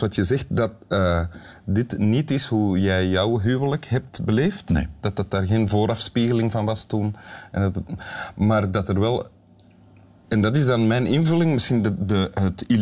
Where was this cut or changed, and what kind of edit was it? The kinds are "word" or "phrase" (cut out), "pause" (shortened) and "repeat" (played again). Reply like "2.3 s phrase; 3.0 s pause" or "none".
none